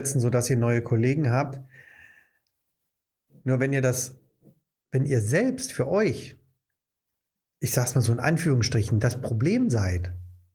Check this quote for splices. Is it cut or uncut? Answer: uncut